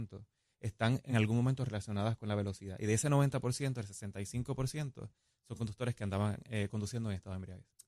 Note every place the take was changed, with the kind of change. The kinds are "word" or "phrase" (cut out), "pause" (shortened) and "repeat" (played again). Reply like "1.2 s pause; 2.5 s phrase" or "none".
none